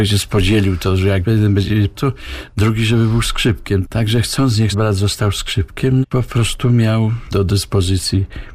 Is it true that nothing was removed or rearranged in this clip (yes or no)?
no